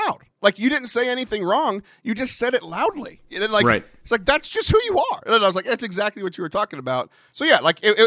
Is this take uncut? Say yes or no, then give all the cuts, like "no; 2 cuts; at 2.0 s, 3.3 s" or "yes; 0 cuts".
yes; 0 cuts